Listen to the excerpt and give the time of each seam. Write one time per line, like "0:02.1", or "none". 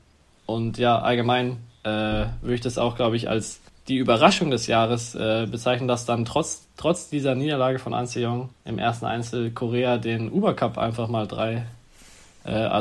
0:03.7
0:06.7
0:08.5